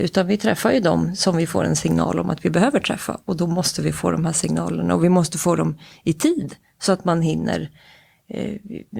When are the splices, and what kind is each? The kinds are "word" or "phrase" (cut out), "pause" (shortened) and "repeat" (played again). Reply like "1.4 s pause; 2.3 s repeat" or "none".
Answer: none